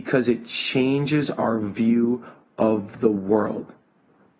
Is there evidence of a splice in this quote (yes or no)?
no